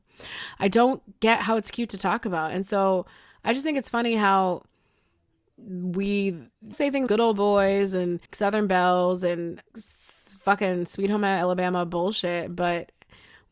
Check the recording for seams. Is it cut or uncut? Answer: cut